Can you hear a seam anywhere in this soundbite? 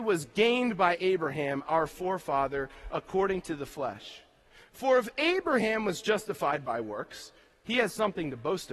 no; 0 cuts

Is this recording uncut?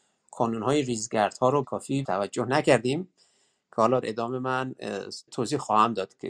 no; 4 cuts; at 1.6 s, 2.0 s, 4.0 s, 5.3 s

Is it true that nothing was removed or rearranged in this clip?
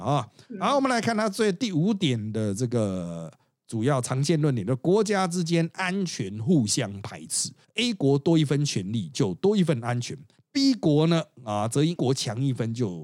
no; 1 cut; at 12.0 s

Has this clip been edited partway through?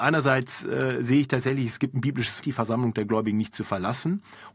yes; 1 cut; at 2.4 s

